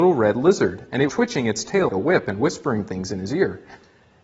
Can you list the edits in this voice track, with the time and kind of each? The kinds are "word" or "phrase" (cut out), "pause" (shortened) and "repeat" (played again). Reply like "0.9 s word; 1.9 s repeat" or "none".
1.1 s word; 1.9 s word

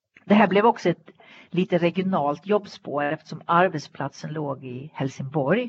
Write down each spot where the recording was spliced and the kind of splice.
none

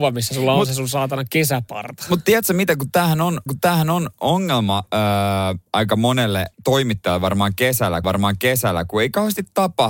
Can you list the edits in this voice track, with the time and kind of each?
3.5 s repeat; 6.5 s pause; 8.0 s repeat

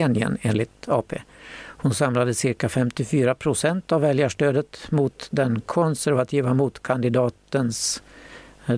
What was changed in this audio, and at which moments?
none

